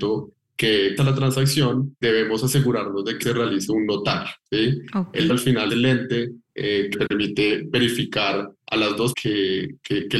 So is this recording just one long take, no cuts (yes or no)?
no